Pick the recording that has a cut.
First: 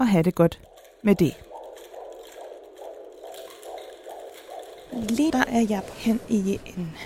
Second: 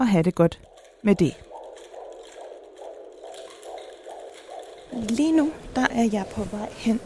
first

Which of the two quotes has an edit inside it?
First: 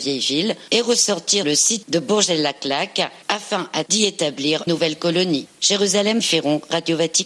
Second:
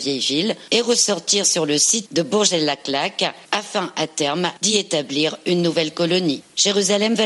first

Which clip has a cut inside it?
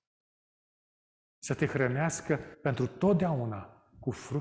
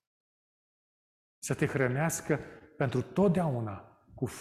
first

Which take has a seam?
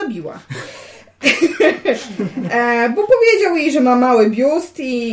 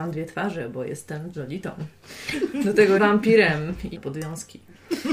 second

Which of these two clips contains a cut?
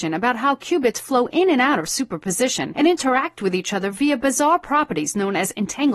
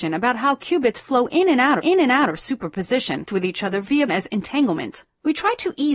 second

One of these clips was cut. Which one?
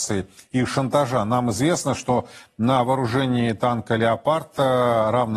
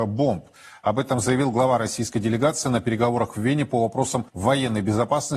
second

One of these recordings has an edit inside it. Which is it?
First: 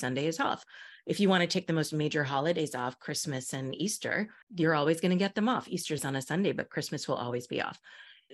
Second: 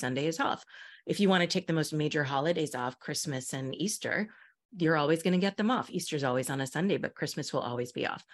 first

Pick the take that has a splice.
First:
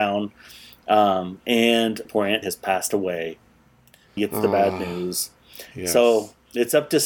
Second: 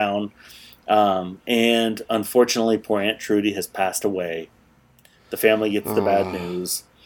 first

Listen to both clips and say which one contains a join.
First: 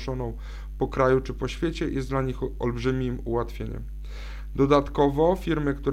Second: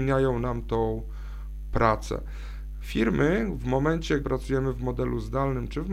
second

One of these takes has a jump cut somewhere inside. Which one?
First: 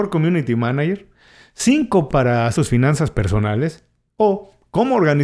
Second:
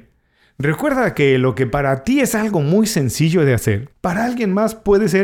first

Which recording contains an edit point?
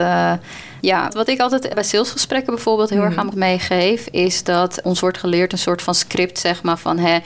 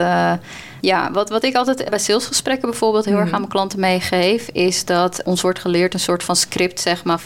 first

